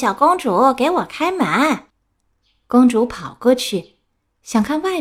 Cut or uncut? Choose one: cut